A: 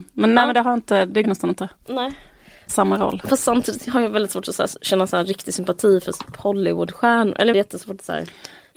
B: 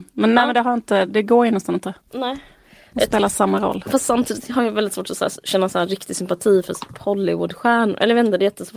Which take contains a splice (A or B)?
A